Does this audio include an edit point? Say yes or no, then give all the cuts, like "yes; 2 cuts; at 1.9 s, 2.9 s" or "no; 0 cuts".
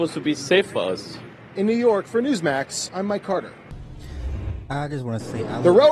no; 0 cuts